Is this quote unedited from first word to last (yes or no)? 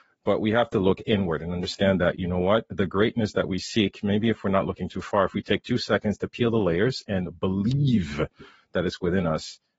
yes